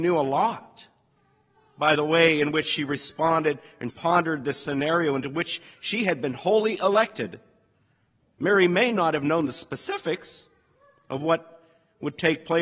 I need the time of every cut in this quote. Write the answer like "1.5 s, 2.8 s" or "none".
3.9 s